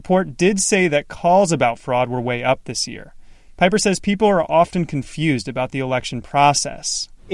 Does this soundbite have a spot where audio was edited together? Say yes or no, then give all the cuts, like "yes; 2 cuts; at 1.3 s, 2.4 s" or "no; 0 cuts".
no; 0 cuts